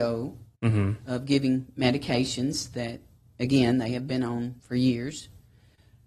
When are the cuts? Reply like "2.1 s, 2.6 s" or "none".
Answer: 4.6 s